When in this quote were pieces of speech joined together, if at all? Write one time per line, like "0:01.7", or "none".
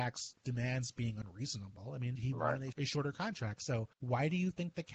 0:02.2
0:02.7
0:03.9